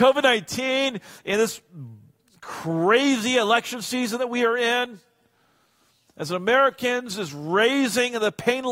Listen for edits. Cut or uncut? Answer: uncut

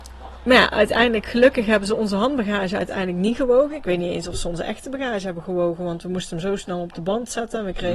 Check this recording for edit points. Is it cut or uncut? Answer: uncut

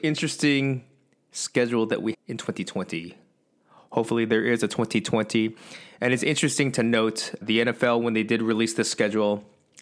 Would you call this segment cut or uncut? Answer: cut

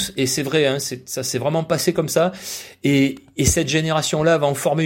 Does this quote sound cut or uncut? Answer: uncut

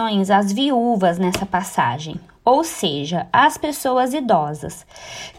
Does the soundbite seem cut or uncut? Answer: uncut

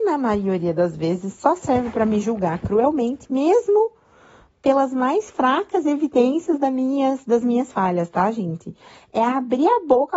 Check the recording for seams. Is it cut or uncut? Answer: uncut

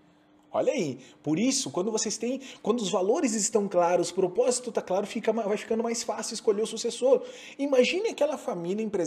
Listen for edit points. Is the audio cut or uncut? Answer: uncut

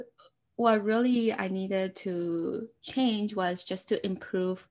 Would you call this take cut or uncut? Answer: uncut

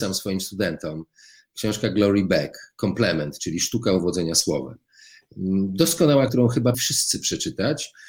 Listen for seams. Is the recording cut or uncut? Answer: cut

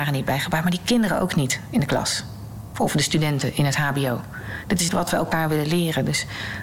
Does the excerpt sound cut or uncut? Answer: cut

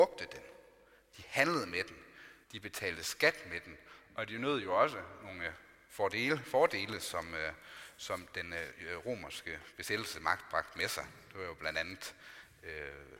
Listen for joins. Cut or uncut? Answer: cut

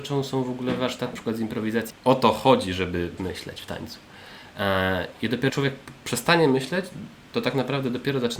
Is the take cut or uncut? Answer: cut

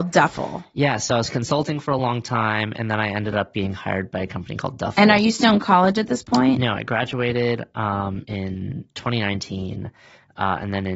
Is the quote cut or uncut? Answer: uncut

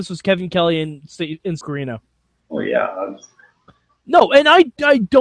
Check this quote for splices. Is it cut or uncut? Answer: cut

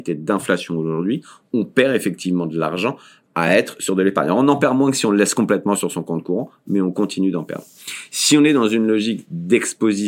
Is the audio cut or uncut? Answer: uncut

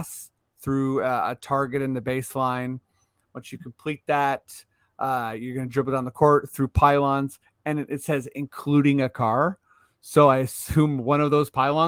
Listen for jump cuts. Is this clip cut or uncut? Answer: uncut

